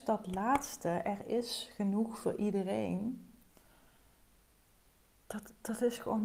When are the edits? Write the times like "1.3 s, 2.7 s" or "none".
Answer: none